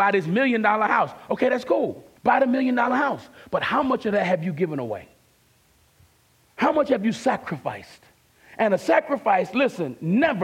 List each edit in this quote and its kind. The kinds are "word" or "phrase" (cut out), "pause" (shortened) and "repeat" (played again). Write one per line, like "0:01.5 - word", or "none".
0:02.2 - pause